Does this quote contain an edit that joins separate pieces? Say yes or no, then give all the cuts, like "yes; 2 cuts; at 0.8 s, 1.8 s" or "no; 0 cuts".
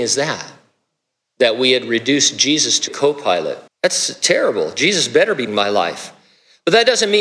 yes; 3 cuts; at 2.9 s, 3.7 s, 5.5 s